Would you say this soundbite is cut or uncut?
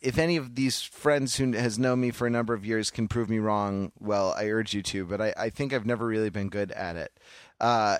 uncut